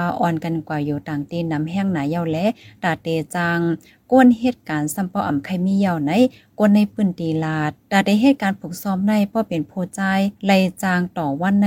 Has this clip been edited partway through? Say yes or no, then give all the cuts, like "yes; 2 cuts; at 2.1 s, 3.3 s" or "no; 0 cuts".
no; 0 cuts